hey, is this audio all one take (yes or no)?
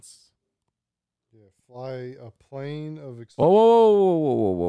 yes